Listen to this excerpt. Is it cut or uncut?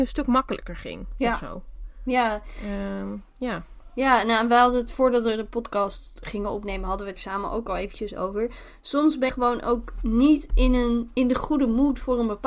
cut